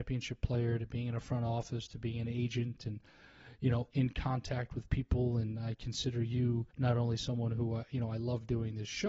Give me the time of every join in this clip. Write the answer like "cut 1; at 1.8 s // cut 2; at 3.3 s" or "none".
cut 1; at 3.9 s // cut 2; at 6.7 s